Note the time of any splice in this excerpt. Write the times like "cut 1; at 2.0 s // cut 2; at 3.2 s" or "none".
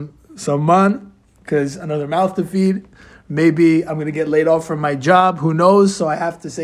none